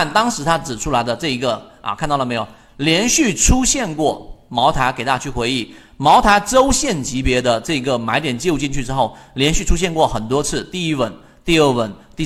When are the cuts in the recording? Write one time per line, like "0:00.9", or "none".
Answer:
none